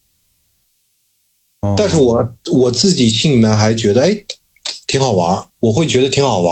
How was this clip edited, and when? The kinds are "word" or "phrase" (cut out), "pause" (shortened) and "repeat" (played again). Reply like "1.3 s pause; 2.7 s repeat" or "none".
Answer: 5.5 s pause